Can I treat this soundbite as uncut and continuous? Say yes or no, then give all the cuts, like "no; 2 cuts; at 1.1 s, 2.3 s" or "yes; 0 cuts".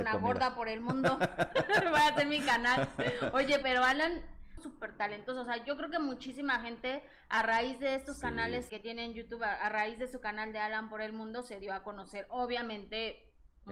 no; 3 cuts; at 3.6 s, 4.6 s, 8.7 s